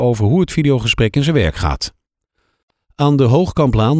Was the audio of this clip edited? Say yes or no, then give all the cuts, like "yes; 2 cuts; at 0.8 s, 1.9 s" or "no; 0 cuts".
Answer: no; 0 cuts